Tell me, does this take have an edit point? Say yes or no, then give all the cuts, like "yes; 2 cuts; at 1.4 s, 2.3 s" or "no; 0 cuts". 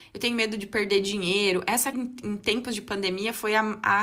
yes; 1 cut; at 1.9 s